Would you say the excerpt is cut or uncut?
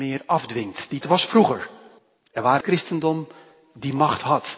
cut